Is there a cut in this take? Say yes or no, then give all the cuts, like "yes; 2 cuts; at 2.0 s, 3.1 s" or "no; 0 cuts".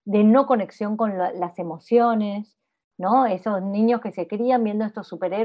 no; 0 cuts